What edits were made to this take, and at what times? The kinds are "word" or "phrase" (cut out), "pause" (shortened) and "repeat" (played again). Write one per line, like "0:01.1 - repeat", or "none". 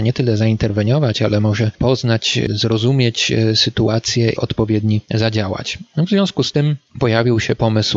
0:04.4 - phrase